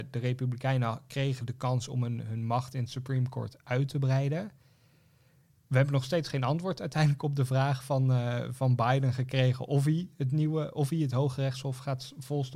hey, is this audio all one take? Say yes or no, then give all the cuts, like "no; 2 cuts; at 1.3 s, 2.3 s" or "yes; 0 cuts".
yes; 0 cuts